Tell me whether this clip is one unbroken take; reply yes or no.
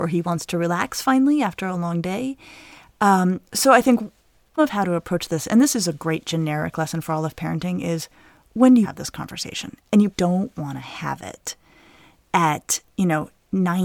no